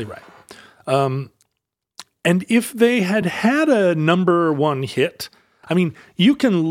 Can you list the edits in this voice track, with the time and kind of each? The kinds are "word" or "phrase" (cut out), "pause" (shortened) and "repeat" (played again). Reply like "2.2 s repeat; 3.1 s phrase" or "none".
none